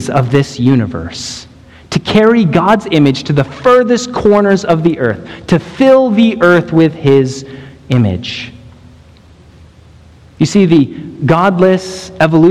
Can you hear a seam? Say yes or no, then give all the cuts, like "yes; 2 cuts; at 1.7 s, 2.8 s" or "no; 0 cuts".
no; 0 cuts